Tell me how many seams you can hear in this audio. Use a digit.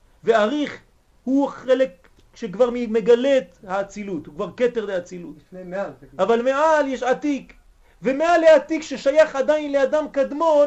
0